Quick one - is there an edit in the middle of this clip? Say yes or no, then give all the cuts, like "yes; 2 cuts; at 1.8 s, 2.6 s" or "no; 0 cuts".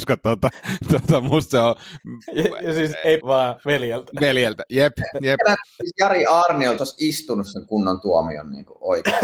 yes; 2 cuts; at 3.2 s, 6.8 s